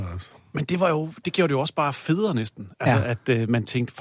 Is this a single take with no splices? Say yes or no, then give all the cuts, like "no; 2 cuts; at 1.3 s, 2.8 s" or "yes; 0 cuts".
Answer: yes; 0 cuts